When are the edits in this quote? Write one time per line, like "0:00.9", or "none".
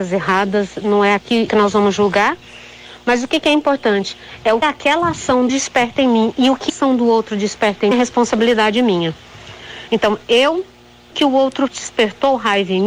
0:01.5
0:04.6
0:05.5
0:06.7
0:07.9
0:11.1
0:11.7